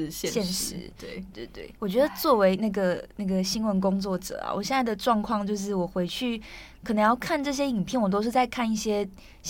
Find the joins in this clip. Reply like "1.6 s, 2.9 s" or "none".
1.3 s, 1.8 s